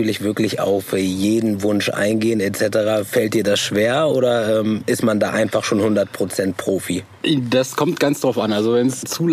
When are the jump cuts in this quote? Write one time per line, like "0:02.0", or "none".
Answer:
none